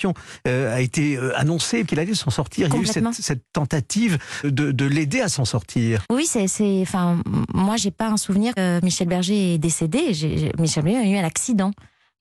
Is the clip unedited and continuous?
no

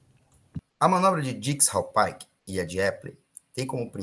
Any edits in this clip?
yes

